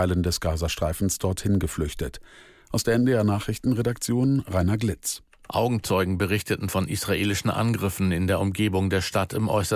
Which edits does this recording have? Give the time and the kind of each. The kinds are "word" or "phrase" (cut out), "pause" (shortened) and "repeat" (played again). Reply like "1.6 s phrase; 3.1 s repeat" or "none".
none